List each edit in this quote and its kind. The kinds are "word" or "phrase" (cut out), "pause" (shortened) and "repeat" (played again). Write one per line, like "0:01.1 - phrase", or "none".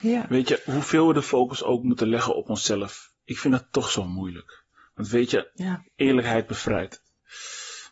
none